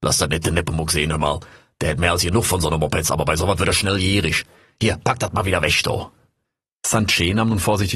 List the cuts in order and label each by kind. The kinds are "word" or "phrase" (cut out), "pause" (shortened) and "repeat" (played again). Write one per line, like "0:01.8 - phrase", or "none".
none